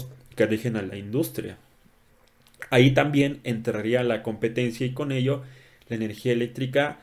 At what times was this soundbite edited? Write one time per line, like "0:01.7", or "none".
none

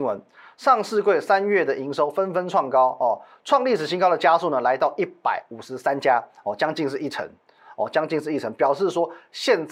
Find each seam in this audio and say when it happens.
none

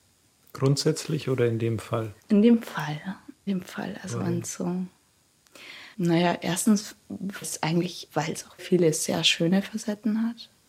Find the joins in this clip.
0:02.2
0:03.5
0:05.9
0:07.4
0:08.1
0:08.6

